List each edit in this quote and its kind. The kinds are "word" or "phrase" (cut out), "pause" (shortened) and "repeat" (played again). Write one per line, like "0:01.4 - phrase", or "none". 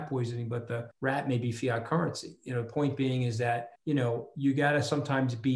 0:00.9 - pause
0:03.8 - pause

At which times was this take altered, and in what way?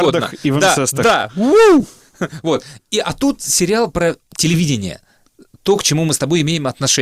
none

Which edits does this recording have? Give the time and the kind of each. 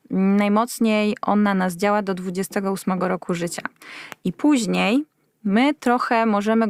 none

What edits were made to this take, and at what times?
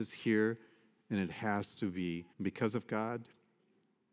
0:02.3 - pause

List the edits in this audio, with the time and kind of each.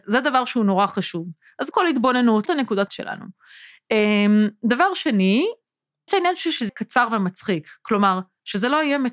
0:01.7 - word
0:02.5 - word
0:02.9 - word
0:06.1 - word
0:06.7 - word

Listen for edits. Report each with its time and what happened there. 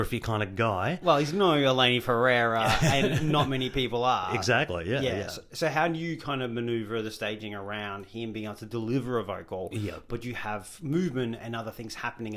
none

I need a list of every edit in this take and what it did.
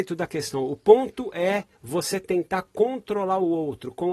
0:01.7 - pause

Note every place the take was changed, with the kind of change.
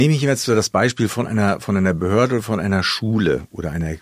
none

